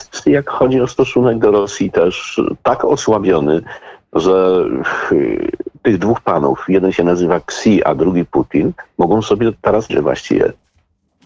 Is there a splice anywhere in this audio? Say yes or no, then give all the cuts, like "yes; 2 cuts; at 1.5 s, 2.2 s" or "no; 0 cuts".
yes; 1 cut; at 9.9 s